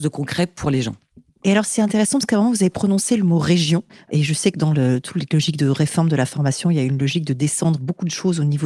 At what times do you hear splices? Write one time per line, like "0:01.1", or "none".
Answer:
none